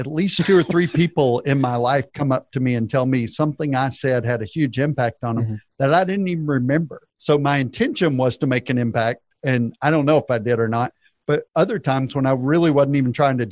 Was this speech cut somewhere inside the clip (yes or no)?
yes